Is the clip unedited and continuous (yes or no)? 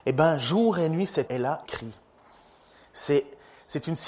no